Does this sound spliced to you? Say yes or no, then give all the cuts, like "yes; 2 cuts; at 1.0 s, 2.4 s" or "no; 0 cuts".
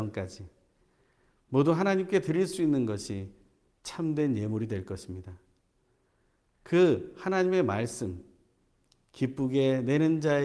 no; 0 cuts